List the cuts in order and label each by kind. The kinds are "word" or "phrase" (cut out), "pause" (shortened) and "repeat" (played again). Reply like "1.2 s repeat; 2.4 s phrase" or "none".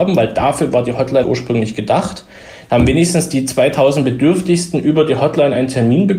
1.2 s word